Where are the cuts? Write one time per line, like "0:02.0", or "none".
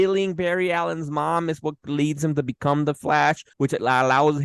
0:03.5